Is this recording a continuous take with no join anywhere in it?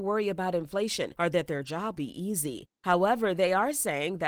no; 1 cut; at 2.0 s

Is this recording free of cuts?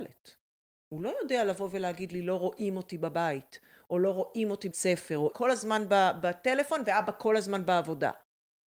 no; 2 cuts; at 4.7 s, 5.3 s

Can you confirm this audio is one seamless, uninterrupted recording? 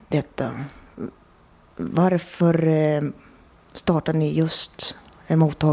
yes; 0 cuts

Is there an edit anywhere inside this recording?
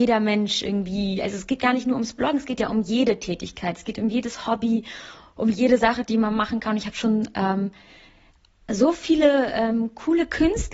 no; 0 cuts

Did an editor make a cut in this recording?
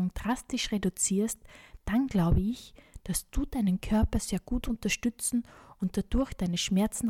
no; 0 cuts

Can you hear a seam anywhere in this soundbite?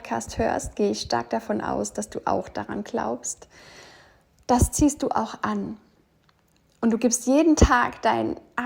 no; 0 cuts

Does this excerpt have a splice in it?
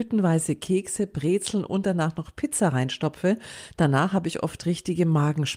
no; 0 cuts

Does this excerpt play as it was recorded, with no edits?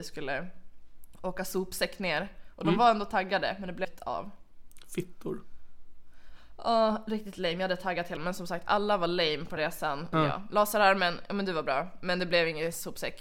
no; 4 cuts; at 3.8 s, 8.2 s, 9.6 s, 10.1 s

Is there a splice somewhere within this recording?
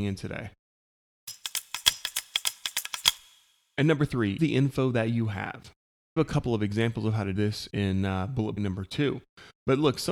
yes; 5 cuts; at 4.4 s, 6.2 s, 7.4 s, 7.7 s, 8.6 s

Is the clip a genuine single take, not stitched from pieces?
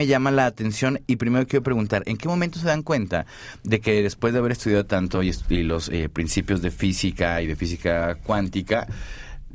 yes; 0 cuts

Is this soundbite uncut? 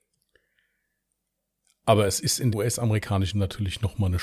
no; 2 cuts; at 2.5 s, 3.3 s

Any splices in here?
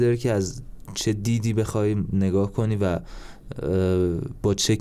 no; 0 cuts

